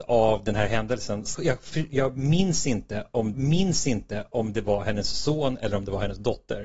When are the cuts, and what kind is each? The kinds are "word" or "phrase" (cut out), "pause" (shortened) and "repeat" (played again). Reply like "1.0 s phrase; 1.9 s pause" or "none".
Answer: 1.3 s word; 3.3 s repeat